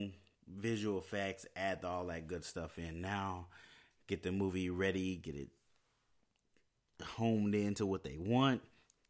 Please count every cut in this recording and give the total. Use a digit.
0